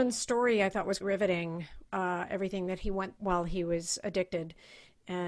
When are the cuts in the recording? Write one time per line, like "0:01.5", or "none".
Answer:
0:01.0
0:01.9
0:03.2

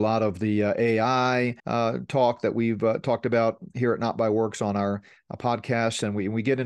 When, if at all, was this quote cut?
0:01.6

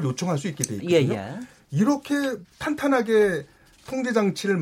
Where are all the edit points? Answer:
none

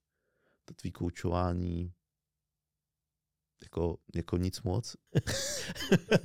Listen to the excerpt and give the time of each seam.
0:04.0

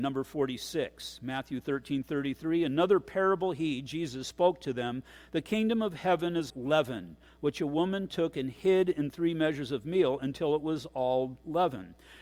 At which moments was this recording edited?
0:06.5

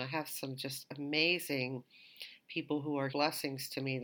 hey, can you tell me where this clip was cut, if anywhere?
0:03.1

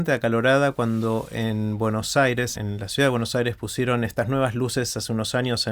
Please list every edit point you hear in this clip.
0:02.6

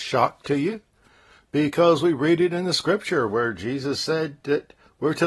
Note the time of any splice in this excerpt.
none

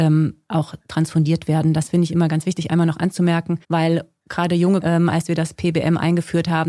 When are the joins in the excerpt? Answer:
0:03.6
0:04.8

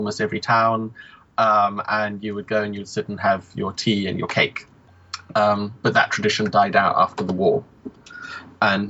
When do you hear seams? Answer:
none

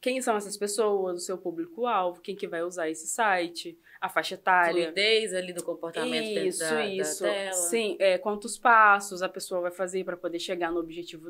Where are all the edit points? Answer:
none

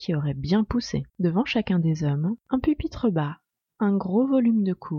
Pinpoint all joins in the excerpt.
0:01.1
0:02.4

